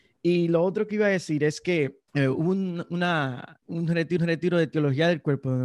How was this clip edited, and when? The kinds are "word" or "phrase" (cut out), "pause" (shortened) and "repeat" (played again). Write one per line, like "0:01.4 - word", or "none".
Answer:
0:02.1 - pause
0:03.6 - word
0:04.2 - repeat